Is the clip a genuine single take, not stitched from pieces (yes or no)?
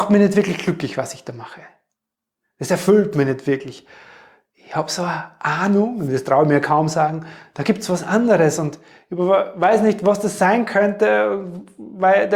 yes